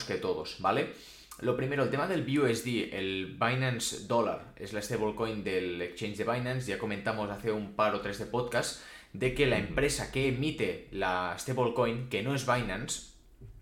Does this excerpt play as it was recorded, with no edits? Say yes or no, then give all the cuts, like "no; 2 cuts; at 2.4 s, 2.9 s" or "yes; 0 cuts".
yes; 0 cuts